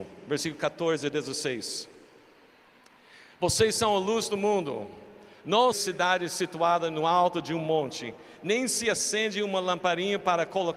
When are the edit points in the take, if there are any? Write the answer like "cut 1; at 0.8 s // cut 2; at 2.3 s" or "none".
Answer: cut 1; at 5.7 s